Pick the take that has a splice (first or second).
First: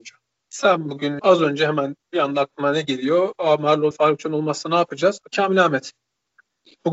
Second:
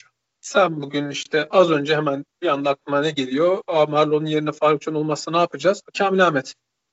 first